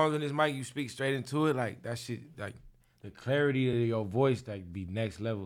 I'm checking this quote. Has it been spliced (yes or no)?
no